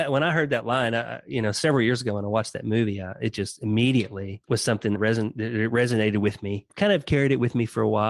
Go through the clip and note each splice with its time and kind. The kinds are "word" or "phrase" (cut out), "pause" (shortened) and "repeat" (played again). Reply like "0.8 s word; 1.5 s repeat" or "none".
4.4 s pause; 5.0 s phrase; 6.7 s pause